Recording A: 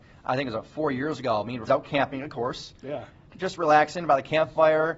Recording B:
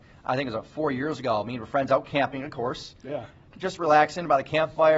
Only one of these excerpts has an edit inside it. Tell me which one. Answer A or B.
A